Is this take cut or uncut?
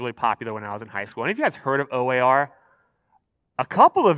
uncut